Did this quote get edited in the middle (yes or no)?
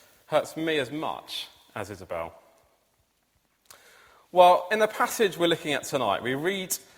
no